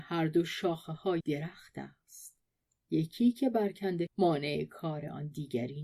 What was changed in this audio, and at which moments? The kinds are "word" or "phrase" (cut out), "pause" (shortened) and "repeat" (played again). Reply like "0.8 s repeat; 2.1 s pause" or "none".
1.2 s word; 4.1 s word